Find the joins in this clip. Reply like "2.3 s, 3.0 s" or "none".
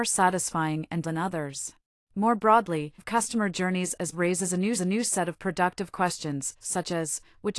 1.0 s, 1.9 s, 3.0 s, 4.1 s, 4.7 s